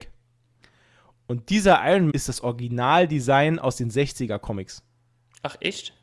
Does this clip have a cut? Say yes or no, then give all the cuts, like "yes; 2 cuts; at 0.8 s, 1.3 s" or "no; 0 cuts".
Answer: yes; 1 cut; at 2.1 s